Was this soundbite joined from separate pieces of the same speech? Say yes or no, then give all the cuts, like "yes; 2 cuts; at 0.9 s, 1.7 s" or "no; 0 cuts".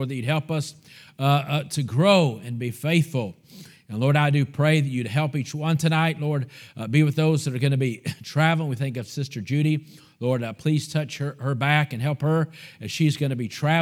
no; 0 cuts